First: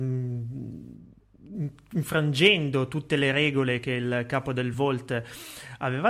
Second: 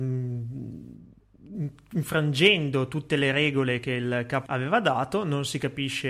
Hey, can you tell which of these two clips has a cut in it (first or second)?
second